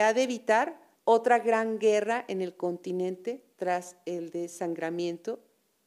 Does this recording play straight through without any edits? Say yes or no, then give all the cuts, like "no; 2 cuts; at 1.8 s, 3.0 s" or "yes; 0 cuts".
no; 1 cut; at 1.0 s